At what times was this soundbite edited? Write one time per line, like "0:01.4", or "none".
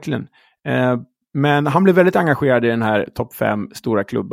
none